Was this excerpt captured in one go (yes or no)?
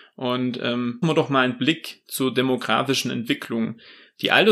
no